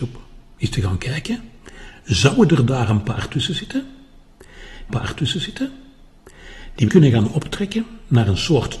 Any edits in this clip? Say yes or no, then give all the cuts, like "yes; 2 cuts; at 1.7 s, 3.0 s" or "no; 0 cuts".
yes; 2 cuts; at 4.9 s, 6.9 s